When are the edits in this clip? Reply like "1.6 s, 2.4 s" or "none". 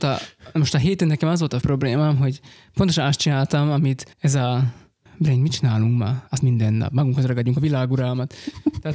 1.6 s, 4.1 s, 5.1 s, 6.4 s